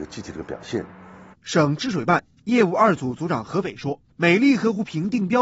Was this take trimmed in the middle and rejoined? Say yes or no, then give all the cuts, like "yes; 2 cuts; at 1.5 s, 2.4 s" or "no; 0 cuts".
yes; 2 cuts; at 1.3 s, 4.1 s